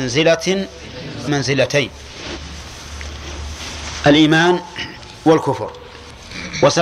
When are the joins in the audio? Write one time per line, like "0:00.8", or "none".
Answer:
0:01.3